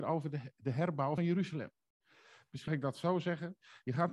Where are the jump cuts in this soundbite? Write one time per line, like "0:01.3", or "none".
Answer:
0:01.2
0:02.7